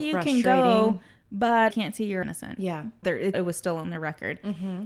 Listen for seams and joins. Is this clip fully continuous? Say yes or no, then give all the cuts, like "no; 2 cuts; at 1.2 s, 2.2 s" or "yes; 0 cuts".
no; 4 cuts; at 1.7 s, 2.2 s, 3.0 s, 3.3 s